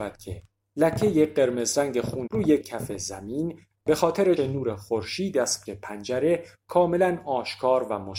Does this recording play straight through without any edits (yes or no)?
no